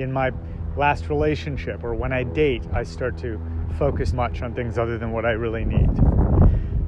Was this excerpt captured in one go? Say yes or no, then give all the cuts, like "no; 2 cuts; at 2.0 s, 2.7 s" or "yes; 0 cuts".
no; 1 cut; at 4.1 s